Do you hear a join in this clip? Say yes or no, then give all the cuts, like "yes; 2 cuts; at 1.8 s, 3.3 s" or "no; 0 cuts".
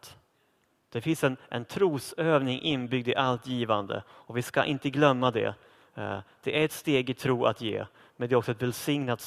no; 0 cuts